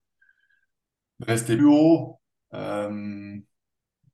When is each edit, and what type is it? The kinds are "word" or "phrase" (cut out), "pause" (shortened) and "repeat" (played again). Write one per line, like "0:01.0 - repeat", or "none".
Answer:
0:01.6 - word